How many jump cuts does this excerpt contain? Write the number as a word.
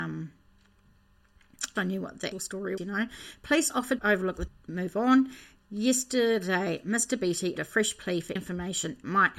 seven